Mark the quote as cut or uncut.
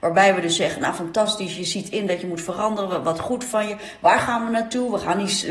uncut